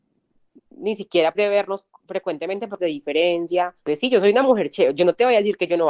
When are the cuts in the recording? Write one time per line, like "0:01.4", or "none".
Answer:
0:01.3
0:02.8
0:03.8

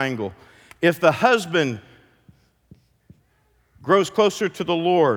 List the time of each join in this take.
none

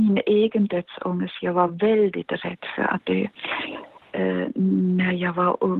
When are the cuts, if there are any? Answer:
none

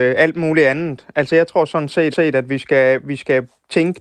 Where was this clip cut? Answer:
0:02.1

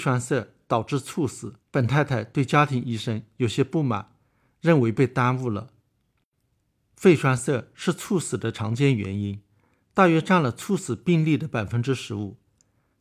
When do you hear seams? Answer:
0:01.6

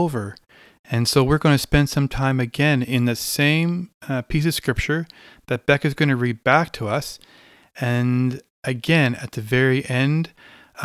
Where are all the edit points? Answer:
none

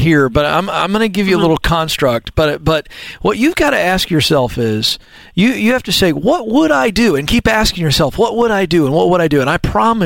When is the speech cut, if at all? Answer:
none

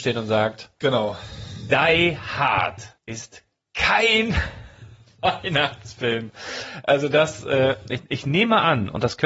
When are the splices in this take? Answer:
0:03.0

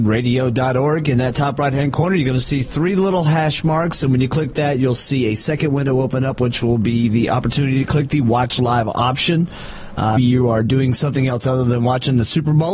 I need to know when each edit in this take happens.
0:10.2

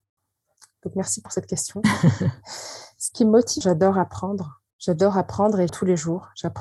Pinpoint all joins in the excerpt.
0:03.6
0:04.7
0:05.7

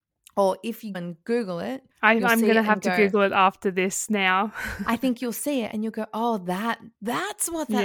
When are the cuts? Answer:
0:00.9
0:01.9
0:06.9

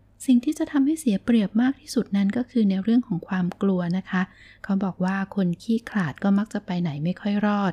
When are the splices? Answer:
none

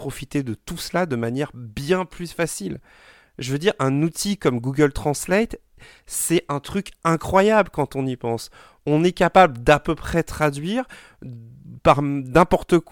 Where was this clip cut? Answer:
none

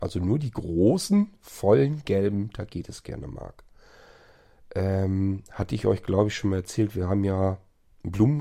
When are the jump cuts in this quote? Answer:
none

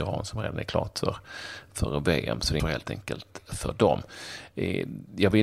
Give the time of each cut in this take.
0:02.6

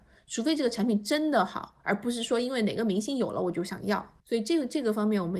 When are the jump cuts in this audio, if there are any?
0:04.2

